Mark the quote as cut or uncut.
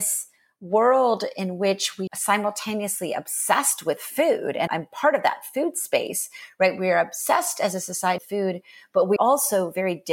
cut